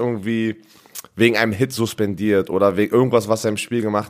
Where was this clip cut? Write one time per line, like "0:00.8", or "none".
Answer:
none